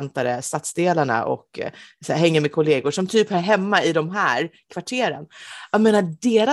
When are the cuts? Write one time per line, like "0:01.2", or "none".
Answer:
none